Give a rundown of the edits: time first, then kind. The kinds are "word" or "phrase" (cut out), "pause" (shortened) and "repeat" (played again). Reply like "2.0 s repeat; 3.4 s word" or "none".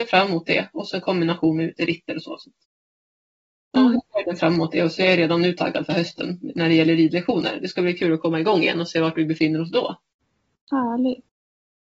none